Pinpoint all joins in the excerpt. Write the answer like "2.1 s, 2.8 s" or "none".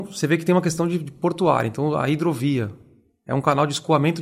none